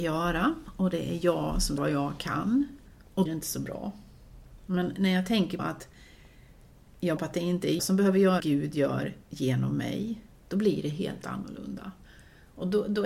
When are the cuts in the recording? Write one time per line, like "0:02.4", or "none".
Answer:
0:01.8
0:02.9
0:03.3
0:04.6
0:05.6
0:07.2
0:07.8
0:08.4
0:10.3